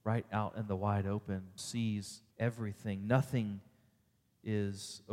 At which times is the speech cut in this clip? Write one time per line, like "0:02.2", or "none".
0:01.6
0:02.3